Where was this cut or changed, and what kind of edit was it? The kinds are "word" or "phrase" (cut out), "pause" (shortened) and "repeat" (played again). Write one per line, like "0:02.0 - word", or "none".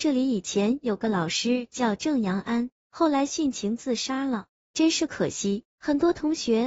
0:05.7 - pause